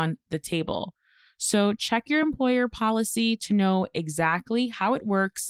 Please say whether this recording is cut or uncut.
uncut